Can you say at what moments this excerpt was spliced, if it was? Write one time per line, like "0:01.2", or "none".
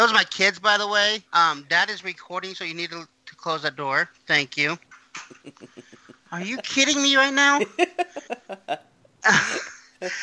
0:01.3
0:04.8